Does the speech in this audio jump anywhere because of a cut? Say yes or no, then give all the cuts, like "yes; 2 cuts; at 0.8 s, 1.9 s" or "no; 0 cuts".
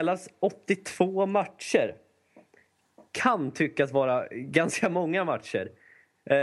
no; 0 cuts